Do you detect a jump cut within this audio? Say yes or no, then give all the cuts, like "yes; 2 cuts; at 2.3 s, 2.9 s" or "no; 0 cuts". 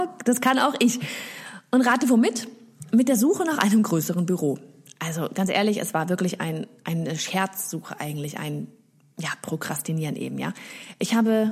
no; 0 cuts